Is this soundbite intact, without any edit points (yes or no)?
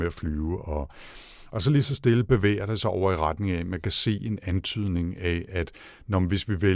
yes